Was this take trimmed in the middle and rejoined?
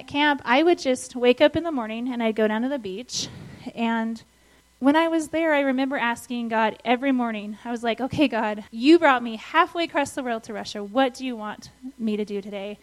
yes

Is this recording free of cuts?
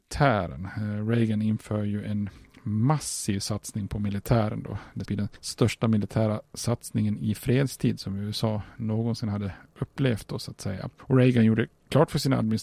no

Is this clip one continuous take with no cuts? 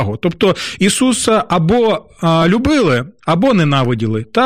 yes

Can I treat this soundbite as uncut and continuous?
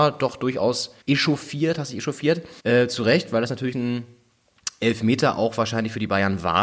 no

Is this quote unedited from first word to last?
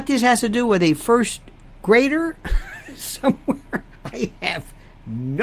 yes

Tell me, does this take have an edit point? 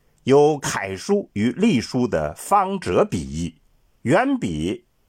yes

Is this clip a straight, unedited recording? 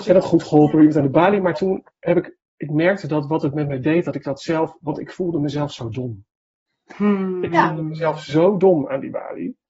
no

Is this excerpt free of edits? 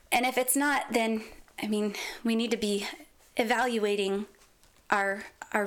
yes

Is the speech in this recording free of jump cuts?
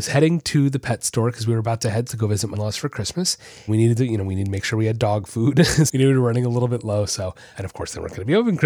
no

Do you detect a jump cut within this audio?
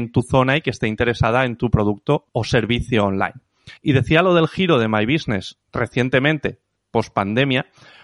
yes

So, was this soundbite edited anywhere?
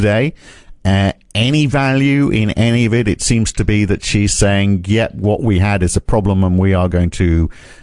no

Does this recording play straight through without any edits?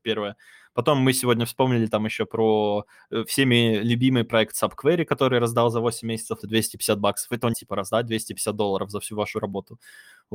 no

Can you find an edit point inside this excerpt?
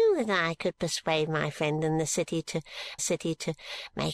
yes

